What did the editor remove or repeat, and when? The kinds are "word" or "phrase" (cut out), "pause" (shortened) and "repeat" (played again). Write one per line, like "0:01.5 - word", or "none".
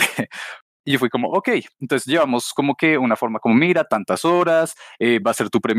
none